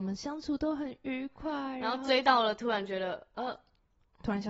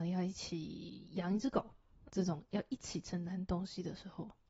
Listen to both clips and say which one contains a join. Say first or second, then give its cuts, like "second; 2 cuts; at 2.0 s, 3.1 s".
second; 1 cut; at 2.1 s